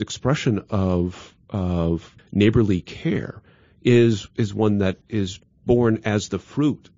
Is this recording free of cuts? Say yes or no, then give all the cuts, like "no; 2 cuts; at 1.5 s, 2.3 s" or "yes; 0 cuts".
no; 2 cuts; at 2.2 s, 5.0 s